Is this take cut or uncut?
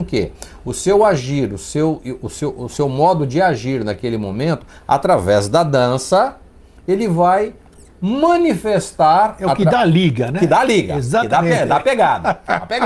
uncut